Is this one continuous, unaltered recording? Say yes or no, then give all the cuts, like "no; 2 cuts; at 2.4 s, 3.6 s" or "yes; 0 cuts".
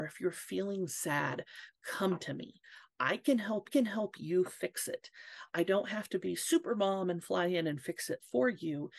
no; 1 cut; at 3.7 s